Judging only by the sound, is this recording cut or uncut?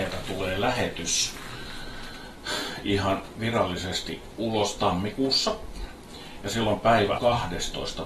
cut